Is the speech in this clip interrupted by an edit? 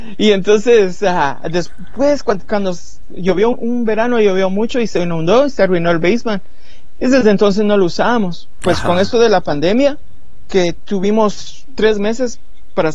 yes; 1 cut; at 3.5 s

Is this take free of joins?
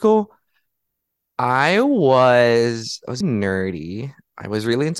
no; 1 cut; at 3.2 s

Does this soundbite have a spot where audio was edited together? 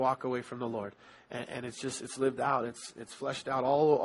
no; 0 cuts

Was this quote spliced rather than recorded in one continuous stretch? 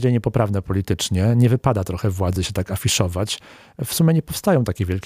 no; 0 cuts

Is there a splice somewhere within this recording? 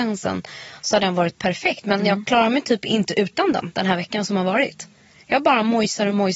no; 0 cuts

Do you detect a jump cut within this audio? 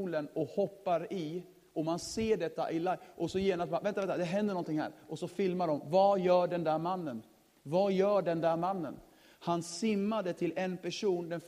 no; 0 cuts

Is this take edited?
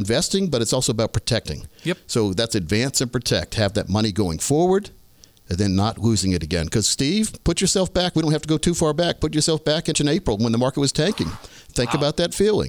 yes; 1 cut; at 9.9 s

